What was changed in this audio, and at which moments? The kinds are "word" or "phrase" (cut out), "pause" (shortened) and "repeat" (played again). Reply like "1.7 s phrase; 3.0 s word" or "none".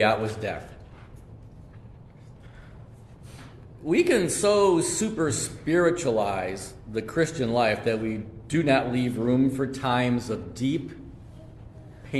none